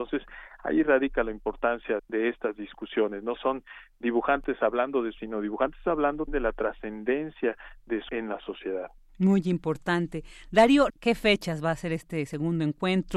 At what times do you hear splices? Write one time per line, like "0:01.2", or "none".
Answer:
0:02.0
0:03.4
0:05.2
0:06.3
0:08.1
0:10.9